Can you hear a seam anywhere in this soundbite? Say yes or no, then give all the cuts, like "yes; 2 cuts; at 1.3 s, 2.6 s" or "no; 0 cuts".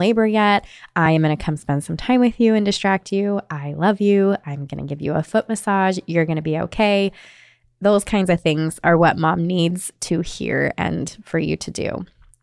no; 0 cuts